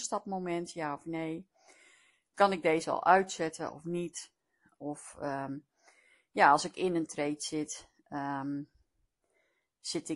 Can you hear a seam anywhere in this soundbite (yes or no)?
no